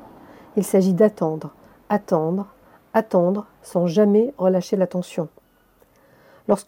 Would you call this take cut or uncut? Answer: uncut